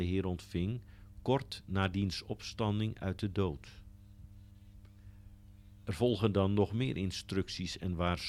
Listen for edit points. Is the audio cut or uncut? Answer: uncut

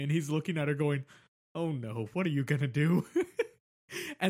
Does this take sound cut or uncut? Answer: uncut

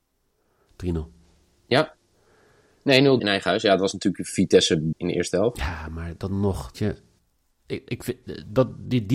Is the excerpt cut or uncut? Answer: cut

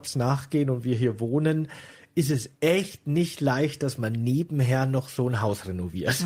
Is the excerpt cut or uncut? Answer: uncut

